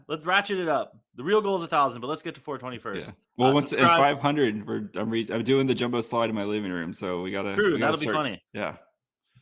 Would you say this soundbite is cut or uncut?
cut